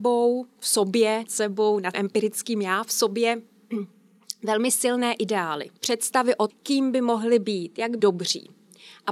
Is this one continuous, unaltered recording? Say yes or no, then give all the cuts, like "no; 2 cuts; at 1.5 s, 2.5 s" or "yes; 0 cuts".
no; 5 cuts; at 1.2 s, 1.9 s, 5.8 s, 6.5 s, 8.0 s